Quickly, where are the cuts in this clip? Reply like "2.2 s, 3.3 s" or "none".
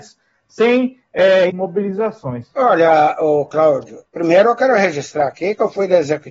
1.5 s, 4.1 s